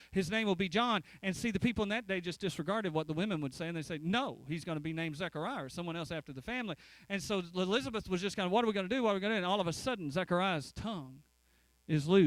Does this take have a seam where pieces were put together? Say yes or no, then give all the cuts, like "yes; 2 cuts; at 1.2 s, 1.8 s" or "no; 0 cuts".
no; 0 cuts